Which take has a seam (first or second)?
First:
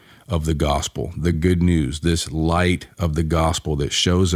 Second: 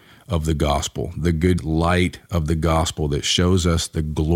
second